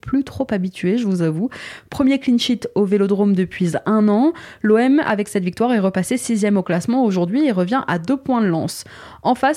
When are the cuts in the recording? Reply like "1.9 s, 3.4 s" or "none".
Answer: none